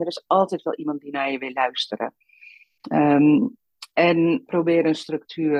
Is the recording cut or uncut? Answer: cut